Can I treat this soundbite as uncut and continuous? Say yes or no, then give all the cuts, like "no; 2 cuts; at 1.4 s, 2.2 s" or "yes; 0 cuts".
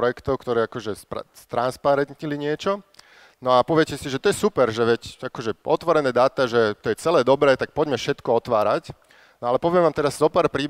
yes; 0 cuts